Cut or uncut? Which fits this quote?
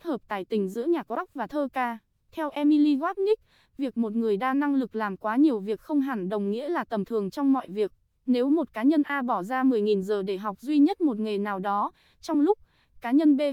uncut